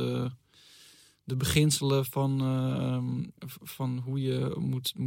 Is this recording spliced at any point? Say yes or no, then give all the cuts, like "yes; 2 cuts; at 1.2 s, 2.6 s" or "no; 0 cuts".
yes; 1 cut; at 3.4 s